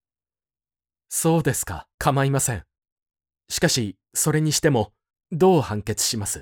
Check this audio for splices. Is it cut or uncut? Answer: cut